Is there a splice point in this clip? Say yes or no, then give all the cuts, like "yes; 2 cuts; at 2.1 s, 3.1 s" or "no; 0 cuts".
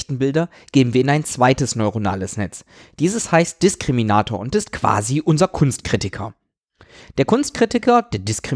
no; 0 cuts